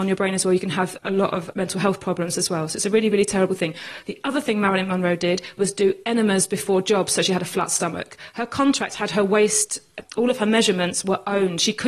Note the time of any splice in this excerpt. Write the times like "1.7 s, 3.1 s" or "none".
none